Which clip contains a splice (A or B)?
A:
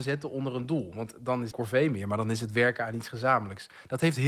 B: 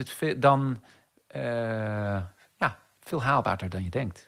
A